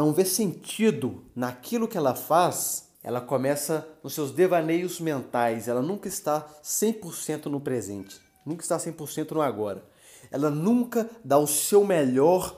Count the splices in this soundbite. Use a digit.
1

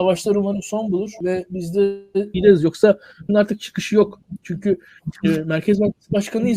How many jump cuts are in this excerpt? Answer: 2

